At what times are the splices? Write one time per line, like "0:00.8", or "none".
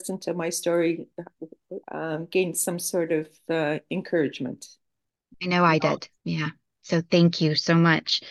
0:01.8
0:06.2